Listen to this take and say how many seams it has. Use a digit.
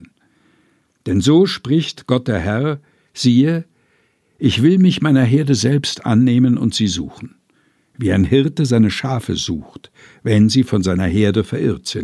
0